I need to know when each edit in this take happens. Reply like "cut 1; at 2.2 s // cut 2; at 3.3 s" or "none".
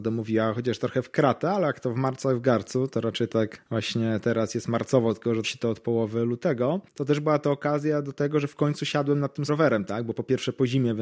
cut 1; at 5.4 s // cut 2; at 9.5 s

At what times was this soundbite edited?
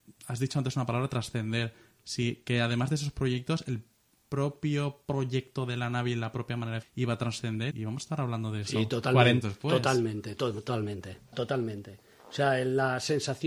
cut 1; at 6.8 s // cut 2; at 7.7 s // cut 3; at 9.4 s // cut 4; at 11.3 s

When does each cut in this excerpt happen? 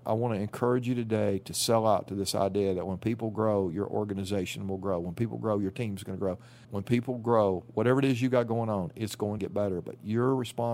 cut 1; at 6.6 s // cut 2; at 9.4 s

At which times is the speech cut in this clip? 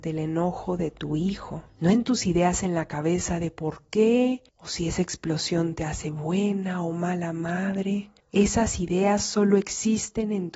cut 1; at 1.7 s // cut 2; at 4.5 s // cut 3; at 8.2 s

